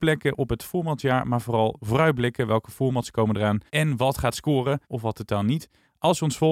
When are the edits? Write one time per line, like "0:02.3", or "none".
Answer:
0:03.7
0:04.8